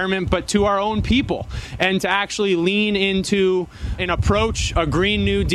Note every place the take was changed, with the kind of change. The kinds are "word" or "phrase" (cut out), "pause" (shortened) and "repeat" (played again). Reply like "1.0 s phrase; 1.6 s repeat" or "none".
4.0 s word